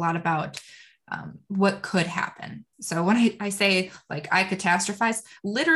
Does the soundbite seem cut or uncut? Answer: cut